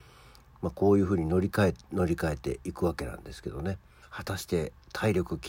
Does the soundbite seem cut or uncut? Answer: cut